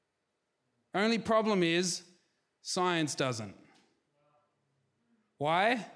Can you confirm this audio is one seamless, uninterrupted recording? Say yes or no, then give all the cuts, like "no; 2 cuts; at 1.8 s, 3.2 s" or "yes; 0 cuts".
yes; 0 cuts